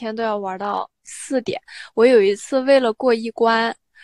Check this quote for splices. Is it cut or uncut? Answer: uncut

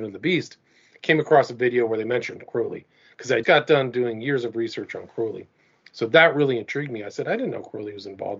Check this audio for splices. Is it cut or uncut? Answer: cut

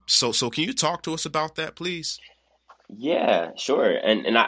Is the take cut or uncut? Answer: uncut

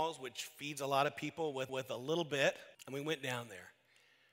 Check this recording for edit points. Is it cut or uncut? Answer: cut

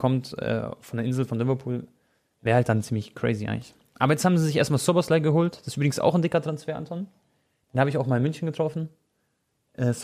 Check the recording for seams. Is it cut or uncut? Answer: uncut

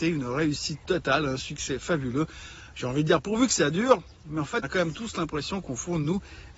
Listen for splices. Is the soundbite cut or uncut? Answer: cut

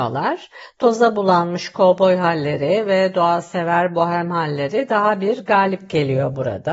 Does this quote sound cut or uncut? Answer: uncut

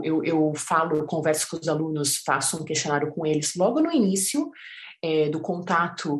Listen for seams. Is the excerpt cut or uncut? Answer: uncut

